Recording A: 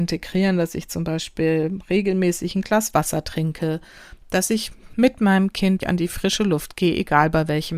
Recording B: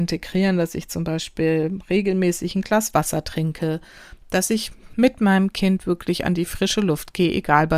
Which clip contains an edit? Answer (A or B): A